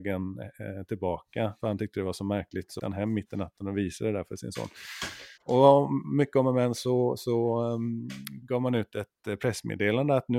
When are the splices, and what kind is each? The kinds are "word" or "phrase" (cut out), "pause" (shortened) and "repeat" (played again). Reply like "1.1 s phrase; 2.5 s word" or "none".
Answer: 2.8 s word; 5.4 s pause; 8.4 s word